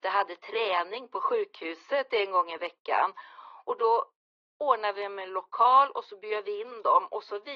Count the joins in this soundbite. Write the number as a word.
zero